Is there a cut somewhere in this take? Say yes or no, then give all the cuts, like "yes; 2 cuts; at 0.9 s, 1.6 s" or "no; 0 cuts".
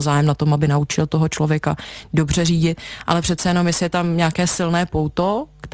no; 0 cuts